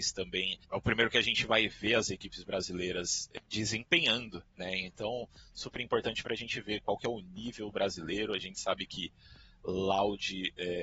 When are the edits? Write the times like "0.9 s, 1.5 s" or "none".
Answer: 4.5 s